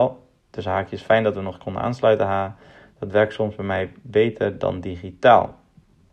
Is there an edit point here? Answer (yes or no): no